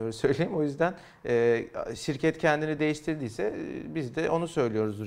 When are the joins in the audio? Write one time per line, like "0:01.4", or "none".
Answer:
none